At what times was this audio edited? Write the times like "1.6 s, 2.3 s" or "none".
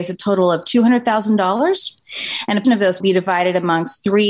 2.6 s, 3.0 s